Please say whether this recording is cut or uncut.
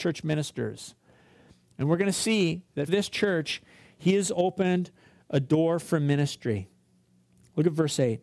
cut